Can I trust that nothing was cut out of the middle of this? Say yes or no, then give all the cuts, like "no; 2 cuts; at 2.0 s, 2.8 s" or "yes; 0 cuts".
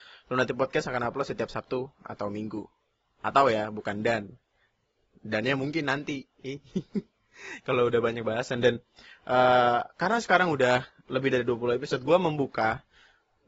yes; 0 cuts